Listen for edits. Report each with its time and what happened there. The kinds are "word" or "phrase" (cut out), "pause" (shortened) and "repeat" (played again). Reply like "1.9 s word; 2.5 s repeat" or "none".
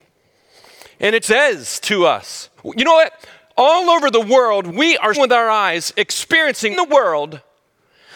1.2 s word; 2.6 s pause; 5.1 s word; 6.7 s phrase